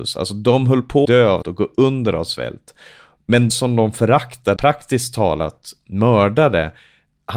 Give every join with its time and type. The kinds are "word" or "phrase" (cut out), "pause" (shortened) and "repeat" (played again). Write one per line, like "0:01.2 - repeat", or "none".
0:01.0 - word
0:01.4 - word
0:03.5 - word
0:04.6 - word